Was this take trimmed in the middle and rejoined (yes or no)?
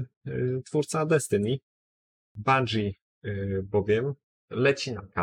no